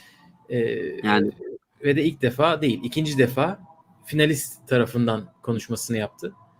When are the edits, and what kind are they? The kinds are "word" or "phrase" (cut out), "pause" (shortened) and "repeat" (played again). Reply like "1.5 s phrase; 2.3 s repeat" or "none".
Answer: 3.8 s pause